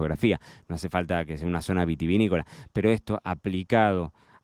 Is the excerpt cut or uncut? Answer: uncut